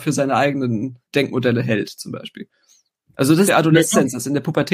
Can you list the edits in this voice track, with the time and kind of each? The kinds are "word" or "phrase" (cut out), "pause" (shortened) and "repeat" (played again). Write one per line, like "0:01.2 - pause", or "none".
0:01.0 - pause
0:03.5 - phrase